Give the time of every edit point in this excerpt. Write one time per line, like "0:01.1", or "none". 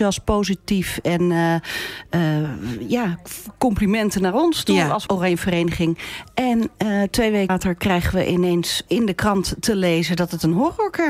0:05.1
0:07.5
0:08.9